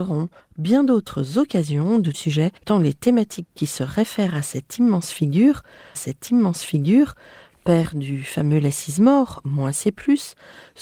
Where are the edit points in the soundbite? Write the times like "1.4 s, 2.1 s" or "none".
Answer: 2.1 s, 2.6 s, 5.9 s